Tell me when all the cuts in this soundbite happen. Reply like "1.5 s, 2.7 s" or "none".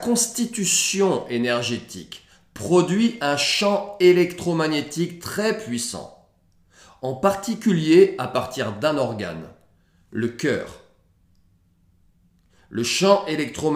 none